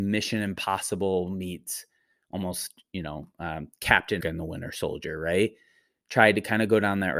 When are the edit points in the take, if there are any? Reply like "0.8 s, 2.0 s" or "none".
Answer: 4.2 s